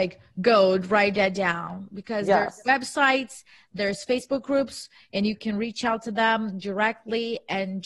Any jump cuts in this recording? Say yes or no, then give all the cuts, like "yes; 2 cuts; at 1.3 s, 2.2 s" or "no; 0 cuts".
no; 0 cuts